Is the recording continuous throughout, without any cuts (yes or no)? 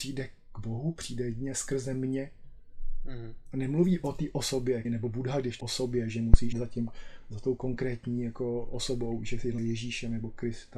no